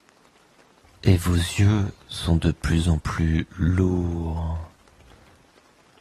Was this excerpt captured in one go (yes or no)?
yes